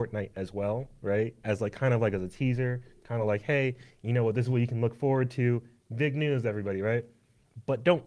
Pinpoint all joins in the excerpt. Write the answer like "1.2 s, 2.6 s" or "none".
none